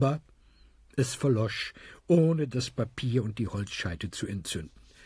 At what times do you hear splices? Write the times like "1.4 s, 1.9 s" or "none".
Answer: none